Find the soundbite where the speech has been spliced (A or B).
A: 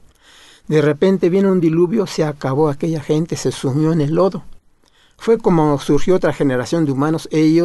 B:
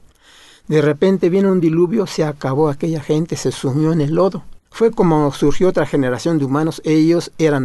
B